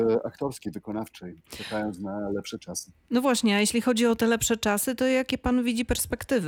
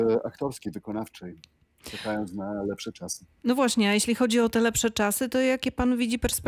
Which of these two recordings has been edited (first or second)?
first